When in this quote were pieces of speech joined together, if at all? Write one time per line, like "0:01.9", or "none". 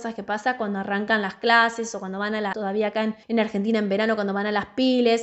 0:02.5
0:03.2